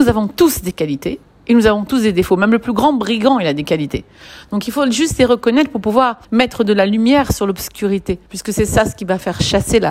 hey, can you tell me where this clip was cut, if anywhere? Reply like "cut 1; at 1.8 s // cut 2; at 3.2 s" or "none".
cut 1; at 6.2 s // cut 2; at 8.3 s